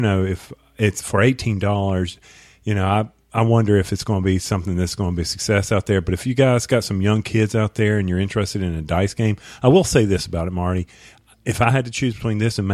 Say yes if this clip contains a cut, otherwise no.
no